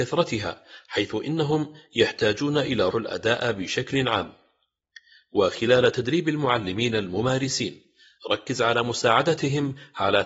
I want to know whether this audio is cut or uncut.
cut